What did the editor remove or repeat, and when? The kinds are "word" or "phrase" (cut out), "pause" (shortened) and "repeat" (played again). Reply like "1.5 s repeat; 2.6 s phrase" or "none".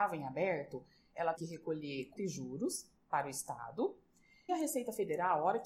1.4 s word; 2.2 s word; 4.5 s word

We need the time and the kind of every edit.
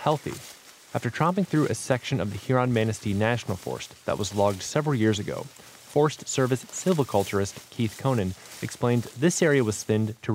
none

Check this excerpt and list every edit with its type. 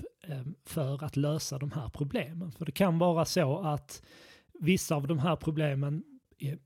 none

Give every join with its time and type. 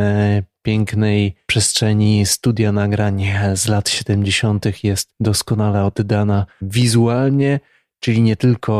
none

